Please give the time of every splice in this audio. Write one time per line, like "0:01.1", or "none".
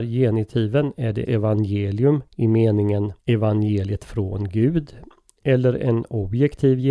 0:01.3
0:02.3
0:03.2